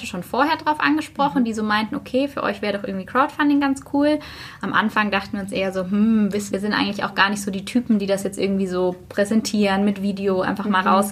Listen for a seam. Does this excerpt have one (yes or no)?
yes